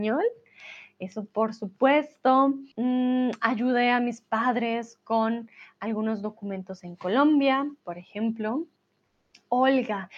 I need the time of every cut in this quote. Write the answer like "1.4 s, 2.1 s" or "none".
2.7 s, 7.8 s